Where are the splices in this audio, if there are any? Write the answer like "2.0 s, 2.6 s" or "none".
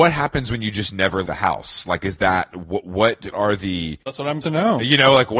1.2 s, 3.3 s, 4.4 s